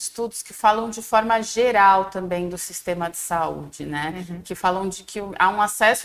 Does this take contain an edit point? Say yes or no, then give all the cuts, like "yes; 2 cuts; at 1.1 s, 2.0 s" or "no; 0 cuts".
no; 0 cuts